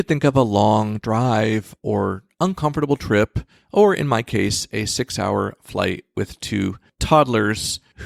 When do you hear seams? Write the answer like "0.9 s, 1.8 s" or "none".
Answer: none

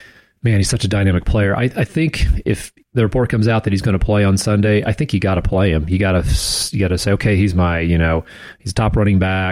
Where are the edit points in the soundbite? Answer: 2.8 s

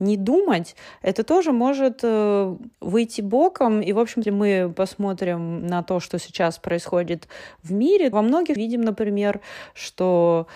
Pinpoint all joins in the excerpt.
2.7 s, 4.2 s, 8.1 s, 8.6 s

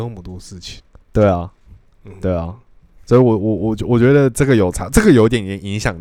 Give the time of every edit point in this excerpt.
1.0 s

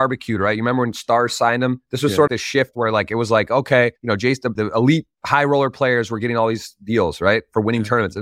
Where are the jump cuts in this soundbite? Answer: 2.3 s, 4.0 s, 4.6 s, 5.1 s

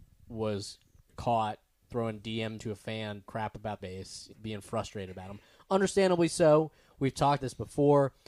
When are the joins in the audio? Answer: 1.1 s, 1.8 s, 2.6 s, 3.2 s, 3.8 s, 4.3 s, 7.4 s

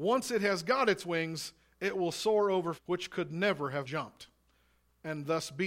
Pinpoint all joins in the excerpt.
2.8 s, 3.9 s

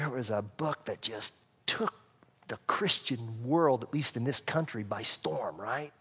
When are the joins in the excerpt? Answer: none

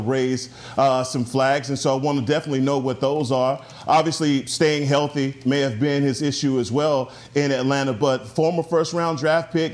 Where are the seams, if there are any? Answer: none

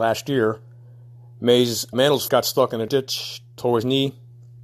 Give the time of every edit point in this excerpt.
1.9 s, 2.3 s, 2.9 s

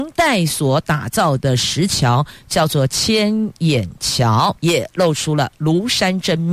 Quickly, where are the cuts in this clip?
4.6 s

